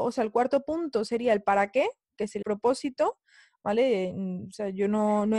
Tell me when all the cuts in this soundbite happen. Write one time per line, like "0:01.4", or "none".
0:02.4